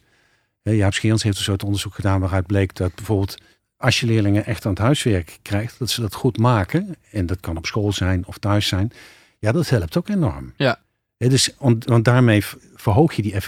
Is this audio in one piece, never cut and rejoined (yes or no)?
yes